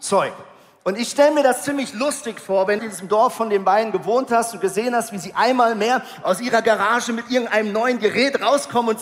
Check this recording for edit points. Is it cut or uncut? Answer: cut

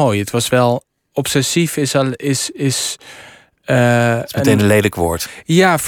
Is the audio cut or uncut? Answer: uncut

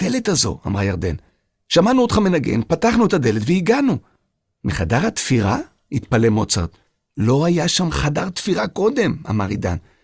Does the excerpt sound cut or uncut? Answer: uncut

